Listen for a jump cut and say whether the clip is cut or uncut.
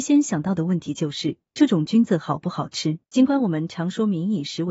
cut